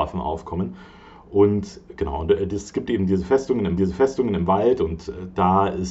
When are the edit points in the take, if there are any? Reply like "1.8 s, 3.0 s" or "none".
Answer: 3.8 s

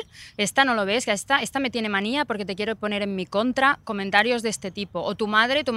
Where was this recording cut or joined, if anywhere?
none

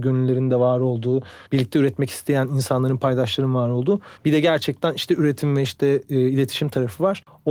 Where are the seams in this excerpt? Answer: 1.5 s, 4.2 s

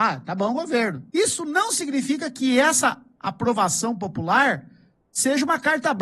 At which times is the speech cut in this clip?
1.1 s

